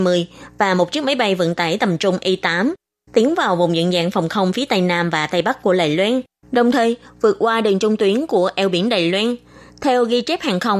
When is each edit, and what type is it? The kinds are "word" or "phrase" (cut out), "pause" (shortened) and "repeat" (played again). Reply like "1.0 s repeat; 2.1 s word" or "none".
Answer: none